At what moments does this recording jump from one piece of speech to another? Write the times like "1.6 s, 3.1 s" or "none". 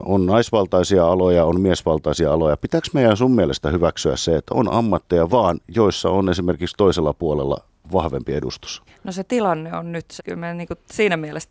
5.3 s, 8.9 s, 10.2 s